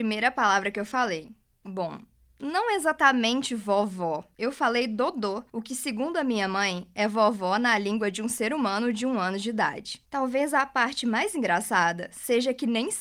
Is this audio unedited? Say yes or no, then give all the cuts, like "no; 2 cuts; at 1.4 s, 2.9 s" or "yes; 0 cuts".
yes; 0 cuts